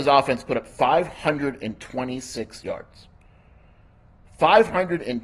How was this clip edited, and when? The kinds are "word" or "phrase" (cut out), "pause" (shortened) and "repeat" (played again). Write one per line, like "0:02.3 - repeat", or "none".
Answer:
none